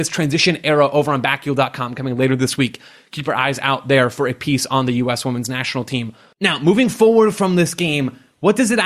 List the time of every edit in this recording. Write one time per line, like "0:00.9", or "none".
none